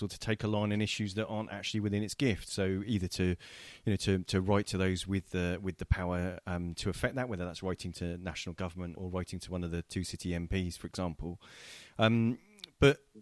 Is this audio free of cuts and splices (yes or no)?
no